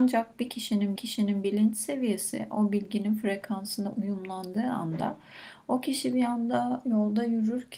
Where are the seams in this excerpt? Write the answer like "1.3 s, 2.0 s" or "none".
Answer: 1.0 s